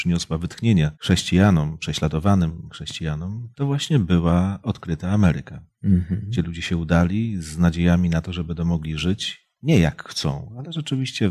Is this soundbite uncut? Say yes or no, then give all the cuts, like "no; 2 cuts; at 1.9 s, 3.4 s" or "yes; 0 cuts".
no; 3 cuts; at 0.9 s, 3.5 s, 9.5 s